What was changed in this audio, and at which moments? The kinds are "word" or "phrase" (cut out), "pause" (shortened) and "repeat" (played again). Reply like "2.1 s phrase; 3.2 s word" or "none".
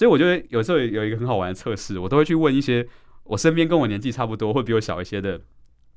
none